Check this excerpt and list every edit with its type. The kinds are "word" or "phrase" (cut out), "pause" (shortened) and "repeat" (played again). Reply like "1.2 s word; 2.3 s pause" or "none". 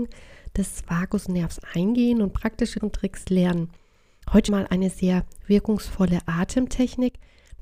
2.8 s word; 4.5 s word